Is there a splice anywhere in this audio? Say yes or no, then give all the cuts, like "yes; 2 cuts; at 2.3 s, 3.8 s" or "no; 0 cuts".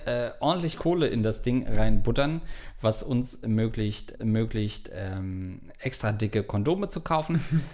yes; 1 cut; at 4.1 s